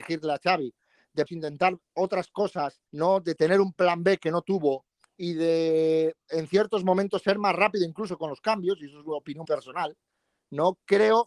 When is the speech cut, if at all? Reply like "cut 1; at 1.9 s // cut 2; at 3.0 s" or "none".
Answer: cut 1; at 1.3 s // cut 2; at 2.9 s // cut 3; at 5.0 s // cut 4; at 9.4 s